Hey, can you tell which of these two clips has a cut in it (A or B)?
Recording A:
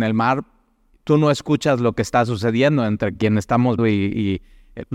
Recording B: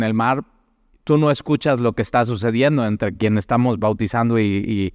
A